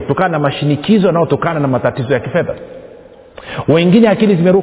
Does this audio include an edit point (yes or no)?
no